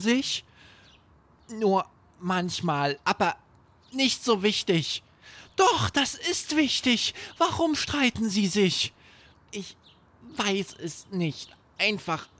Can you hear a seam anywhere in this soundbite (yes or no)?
yes